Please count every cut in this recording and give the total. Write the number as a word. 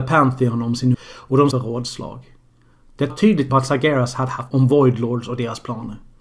five